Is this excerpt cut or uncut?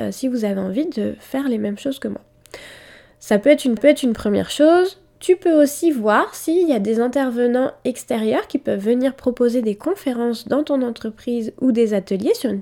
cut